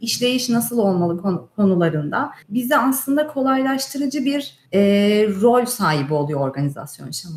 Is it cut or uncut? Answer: cut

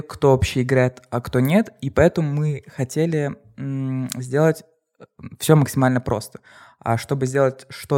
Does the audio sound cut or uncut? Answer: uncut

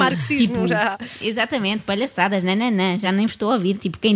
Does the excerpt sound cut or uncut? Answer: uncut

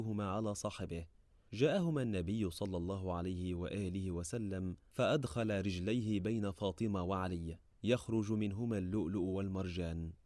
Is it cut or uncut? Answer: uncut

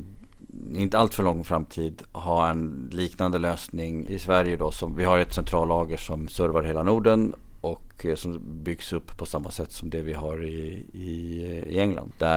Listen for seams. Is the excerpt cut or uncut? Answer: uncut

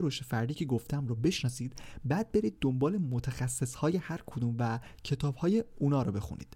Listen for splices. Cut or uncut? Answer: uncut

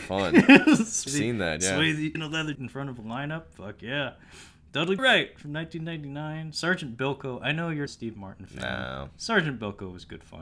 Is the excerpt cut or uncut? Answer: cut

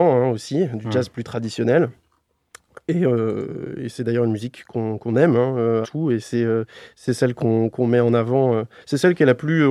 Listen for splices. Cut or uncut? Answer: cut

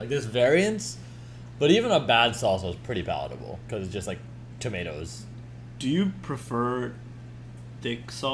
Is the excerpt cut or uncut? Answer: uncut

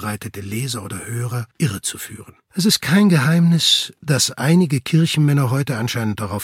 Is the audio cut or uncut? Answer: cut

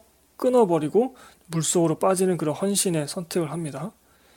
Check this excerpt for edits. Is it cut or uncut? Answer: uncut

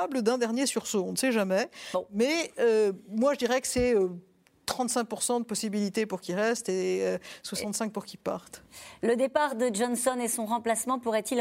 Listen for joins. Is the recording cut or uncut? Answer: uncut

